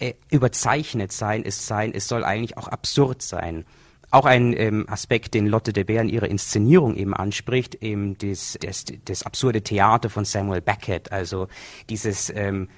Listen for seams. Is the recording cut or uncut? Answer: cut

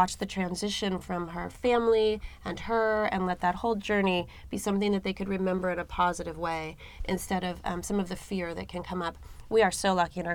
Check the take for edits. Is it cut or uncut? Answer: uncut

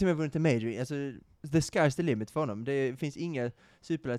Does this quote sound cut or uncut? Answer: uncut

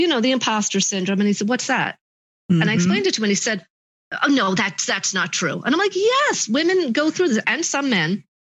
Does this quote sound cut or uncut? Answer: uncut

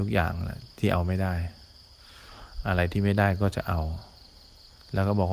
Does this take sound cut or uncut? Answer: uncut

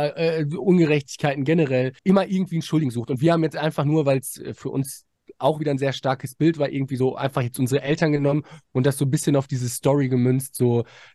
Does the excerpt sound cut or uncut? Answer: cut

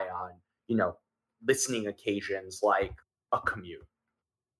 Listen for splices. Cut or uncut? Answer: uncut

